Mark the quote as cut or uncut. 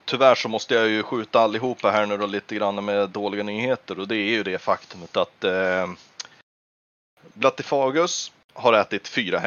uncut